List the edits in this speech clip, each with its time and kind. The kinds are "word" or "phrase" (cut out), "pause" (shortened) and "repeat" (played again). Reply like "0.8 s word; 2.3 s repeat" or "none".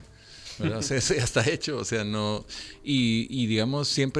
none